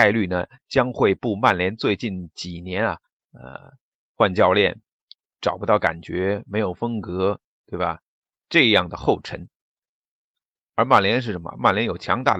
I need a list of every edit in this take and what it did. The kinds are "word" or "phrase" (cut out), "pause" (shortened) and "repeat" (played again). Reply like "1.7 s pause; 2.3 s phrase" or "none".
none